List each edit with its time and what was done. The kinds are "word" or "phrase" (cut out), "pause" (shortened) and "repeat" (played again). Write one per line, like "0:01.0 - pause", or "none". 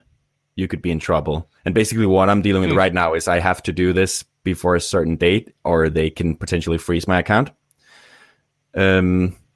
0:01.6 - pause

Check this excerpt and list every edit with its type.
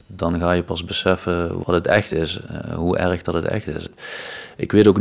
none

